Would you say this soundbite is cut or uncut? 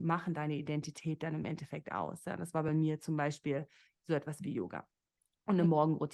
uncut